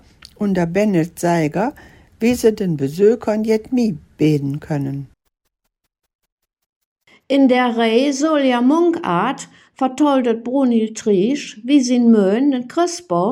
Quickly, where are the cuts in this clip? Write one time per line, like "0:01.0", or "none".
none

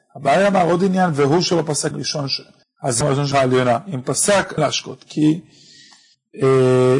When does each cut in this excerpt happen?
0:01.9
0:03.0
0:03.3
0:04.6

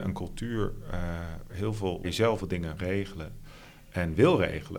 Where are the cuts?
0:01.5
0:02.0
0:02.4
0:02.8

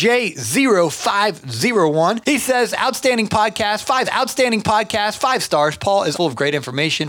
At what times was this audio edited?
0:04.0
0:06.1

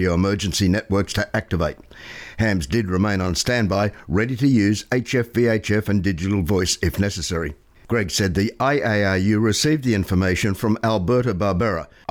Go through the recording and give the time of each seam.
none

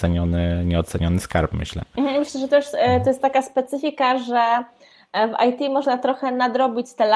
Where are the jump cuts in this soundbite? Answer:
none

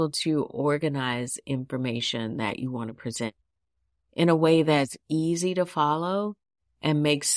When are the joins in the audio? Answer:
none

